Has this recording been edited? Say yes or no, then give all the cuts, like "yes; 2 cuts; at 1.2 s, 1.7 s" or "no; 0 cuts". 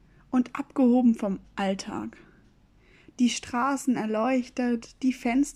no; 0 cuts